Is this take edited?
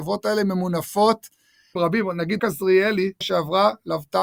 yes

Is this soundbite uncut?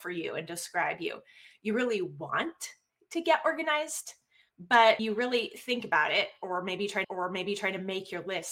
no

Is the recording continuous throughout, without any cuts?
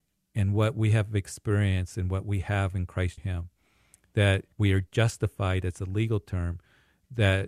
no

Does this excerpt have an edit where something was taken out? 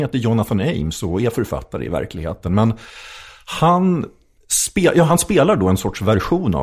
no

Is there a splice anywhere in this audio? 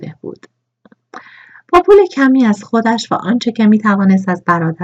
no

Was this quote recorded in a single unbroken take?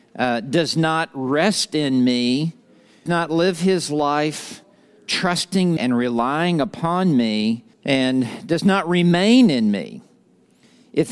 no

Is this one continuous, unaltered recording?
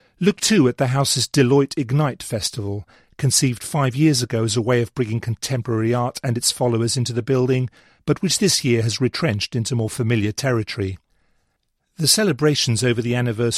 yes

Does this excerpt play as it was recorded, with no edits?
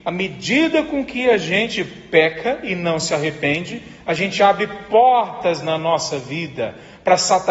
yes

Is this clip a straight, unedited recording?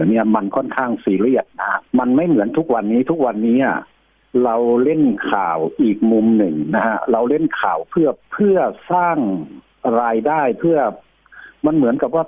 no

